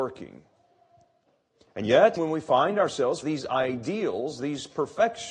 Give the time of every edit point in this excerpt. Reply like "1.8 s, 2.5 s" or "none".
2.2 s, 3.2 s